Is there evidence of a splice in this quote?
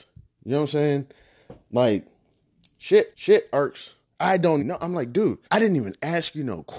yes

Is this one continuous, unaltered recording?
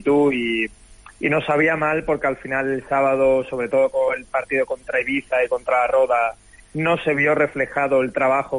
yes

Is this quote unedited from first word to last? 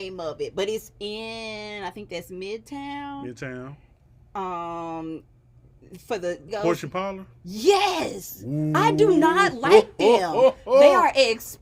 no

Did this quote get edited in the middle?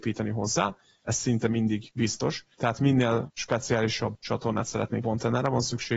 yes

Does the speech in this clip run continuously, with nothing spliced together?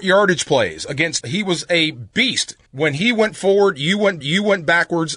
no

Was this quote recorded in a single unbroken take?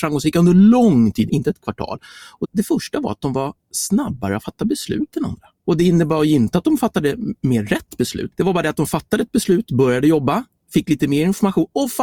no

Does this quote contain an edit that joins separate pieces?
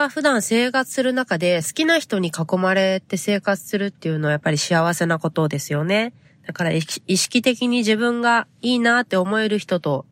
yes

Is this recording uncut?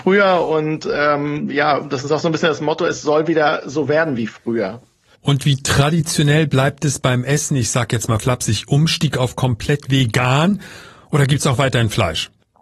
yes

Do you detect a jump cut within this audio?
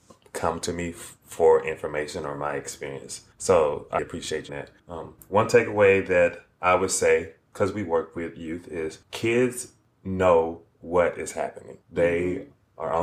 yes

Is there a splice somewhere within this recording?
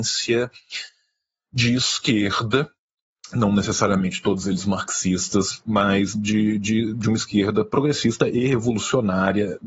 no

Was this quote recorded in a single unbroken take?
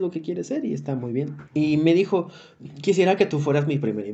no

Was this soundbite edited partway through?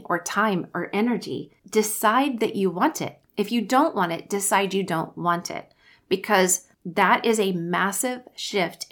yes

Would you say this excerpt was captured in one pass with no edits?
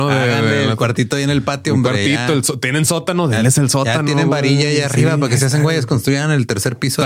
yes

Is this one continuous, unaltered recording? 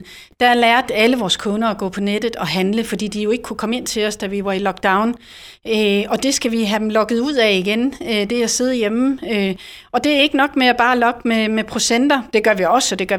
yes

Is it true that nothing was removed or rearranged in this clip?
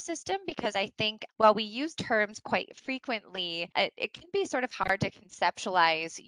no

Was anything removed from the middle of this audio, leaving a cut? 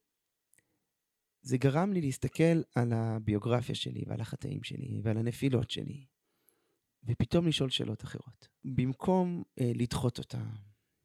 no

